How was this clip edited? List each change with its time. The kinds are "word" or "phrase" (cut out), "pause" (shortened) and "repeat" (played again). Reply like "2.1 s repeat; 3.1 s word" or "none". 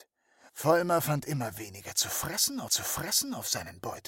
2.7 s repeat